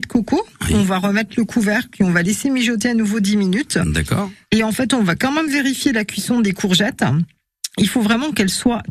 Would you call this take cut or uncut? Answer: uncut